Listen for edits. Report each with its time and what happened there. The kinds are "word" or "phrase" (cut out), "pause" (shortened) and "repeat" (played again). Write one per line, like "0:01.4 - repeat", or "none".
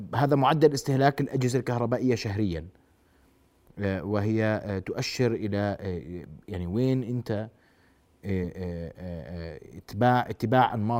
none